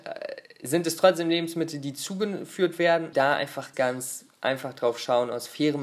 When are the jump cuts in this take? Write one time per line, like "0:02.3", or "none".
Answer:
0:03.1
0:03.7